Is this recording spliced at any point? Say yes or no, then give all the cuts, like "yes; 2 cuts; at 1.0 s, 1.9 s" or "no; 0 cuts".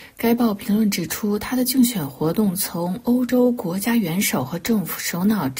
no; 0 cuts